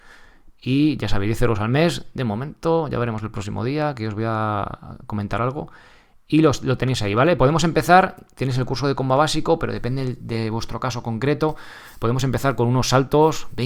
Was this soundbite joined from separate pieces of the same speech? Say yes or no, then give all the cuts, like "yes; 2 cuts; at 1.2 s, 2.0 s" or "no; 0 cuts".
no; 0 cuts